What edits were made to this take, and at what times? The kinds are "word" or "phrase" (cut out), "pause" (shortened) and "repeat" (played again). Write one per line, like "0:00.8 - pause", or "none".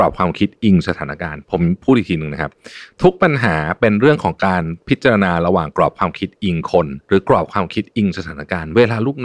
0:07.0 - pause